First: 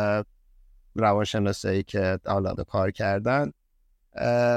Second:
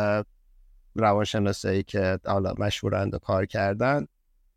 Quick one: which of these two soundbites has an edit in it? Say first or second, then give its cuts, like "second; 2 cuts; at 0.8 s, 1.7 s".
first; 1 cut; at 2.6 s